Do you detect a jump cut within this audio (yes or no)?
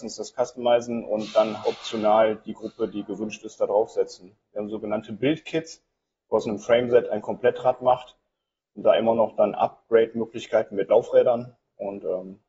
yes